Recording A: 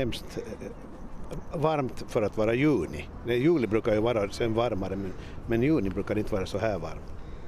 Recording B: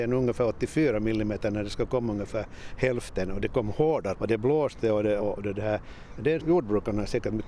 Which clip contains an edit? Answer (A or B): B